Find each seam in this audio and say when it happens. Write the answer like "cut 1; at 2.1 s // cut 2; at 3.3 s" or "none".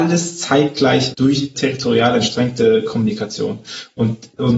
cut 1; at 1.1 s // cut 2; at 1.5 s